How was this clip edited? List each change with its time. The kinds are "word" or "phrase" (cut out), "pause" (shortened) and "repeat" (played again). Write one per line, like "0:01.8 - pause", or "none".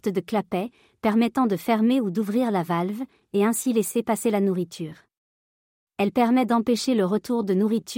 none